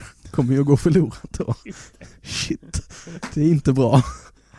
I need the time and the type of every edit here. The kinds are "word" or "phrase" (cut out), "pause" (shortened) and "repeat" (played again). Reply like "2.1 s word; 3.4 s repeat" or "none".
none